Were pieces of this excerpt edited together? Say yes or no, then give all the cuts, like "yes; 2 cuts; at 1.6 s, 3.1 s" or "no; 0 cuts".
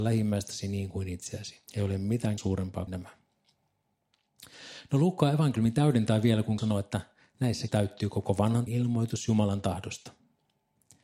yes; 6 cuts; at 1.7 s, 2.4 s, 2.9 s, 6.6 s, 7.7 s, 8.7 s